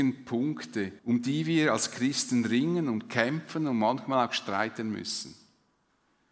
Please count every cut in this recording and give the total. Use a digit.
1